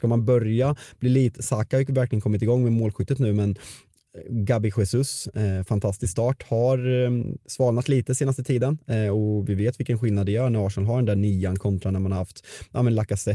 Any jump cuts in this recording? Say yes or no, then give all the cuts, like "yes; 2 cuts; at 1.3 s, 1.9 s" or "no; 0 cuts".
no; 0 cuts